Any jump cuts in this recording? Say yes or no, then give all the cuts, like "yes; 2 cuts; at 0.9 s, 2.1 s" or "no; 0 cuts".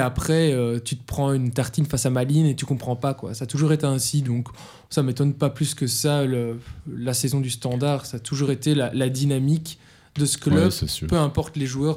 no; 0 cuts